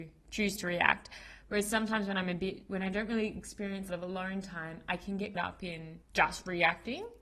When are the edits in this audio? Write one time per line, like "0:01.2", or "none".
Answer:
0:03.9
0:05.3
0:06.0